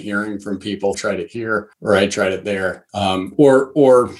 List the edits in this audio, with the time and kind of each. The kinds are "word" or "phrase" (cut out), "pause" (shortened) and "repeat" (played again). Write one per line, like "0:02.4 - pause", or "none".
0:00.9 - phrase
0:01.7 - pause
0:02.9 - pause